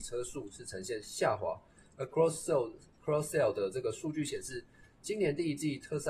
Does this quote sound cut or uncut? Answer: uncut